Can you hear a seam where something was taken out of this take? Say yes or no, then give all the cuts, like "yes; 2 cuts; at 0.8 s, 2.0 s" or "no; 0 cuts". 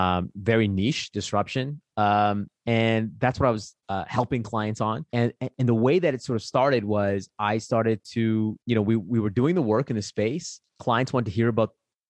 yes; 5 cuts; at 2.6 s, 3.8 s, 5.1 s, 8.6 s, 10.7 s